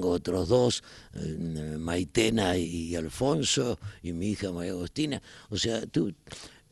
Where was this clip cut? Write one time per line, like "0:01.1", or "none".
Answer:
none

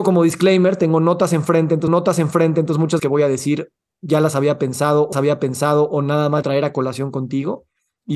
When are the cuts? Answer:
0:01.9
0:03.0
0:05.1
0:06.4

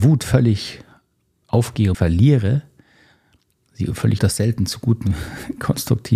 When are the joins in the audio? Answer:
0:01.9
0:04.2

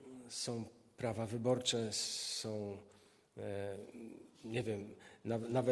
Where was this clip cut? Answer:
0:04.3

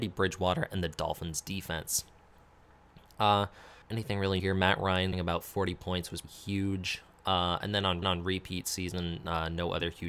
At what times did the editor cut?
0:03.8
0:04.4
0:05.1
0:06.2
0:08.0

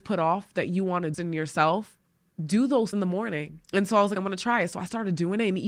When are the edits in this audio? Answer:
0:01.1
0:02.1
0:02.9
0:03.6
0:04.2

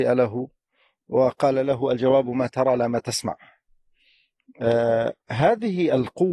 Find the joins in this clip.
none

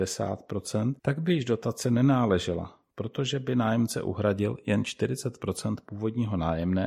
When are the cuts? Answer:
0:01.0

